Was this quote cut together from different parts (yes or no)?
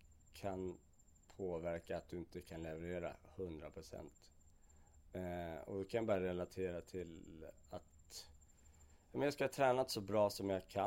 no